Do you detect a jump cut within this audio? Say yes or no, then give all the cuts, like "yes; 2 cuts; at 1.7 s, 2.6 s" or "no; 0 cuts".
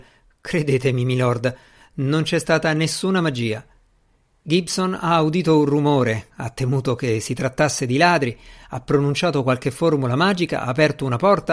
no; 0 cuts